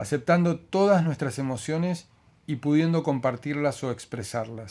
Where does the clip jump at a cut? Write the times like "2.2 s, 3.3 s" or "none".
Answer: none